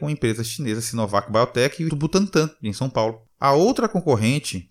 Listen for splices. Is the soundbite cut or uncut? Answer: cut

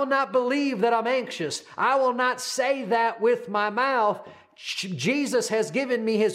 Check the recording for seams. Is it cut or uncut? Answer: uncut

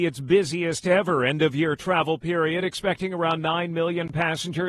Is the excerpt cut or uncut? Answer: uncut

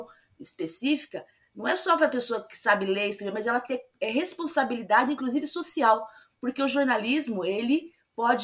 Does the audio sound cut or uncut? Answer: uncut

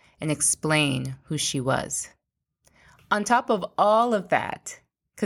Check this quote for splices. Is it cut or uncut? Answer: uncut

